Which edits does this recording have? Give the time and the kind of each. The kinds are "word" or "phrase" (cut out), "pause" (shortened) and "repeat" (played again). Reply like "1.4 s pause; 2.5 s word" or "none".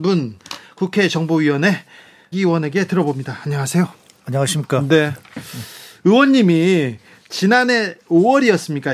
2.3 s phrase